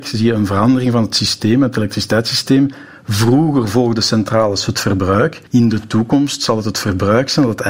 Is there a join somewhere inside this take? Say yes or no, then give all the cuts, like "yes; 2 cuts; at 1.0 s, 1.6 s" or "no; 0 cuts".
yes; 1 cut; at 5.5 s